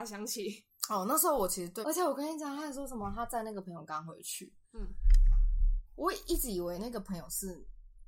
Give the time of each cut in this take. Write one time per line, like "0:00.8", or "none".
0:01.8